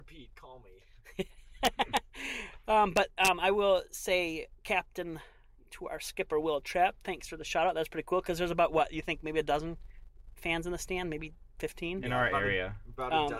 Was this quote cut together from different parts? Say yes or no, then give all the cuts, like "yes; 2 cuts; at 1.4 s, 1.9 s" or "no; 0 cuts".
no; 0 cuts